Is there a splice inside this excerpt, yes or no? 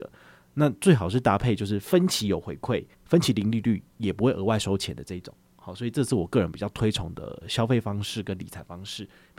yes